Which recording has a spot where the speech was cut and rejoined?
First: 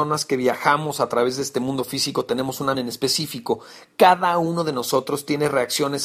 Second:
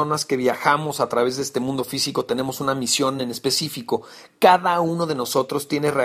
first; 1 cut; at 2.7 s

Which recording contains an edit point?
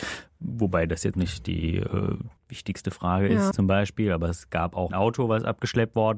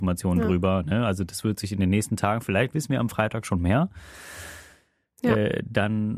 first; 4 cuts; at 1.1 s, 2.4 s, 3.5 s, 4.9 s

